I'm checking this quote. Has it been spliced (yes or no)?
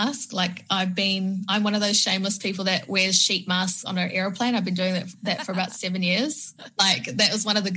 no